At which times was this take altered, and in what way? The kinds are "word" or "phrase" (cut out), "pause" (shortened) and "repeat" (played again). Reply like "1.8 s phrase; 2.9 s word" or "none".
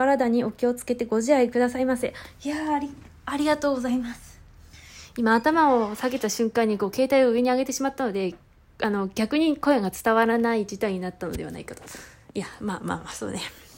none